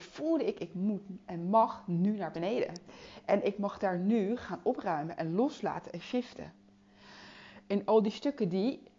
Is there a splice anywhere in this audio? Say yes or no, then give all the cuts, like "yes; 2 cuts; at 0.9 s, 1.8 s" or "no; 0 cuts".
no; 0 cuts